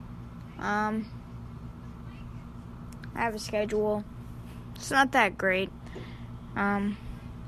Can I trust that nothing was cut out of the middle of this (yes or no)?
yes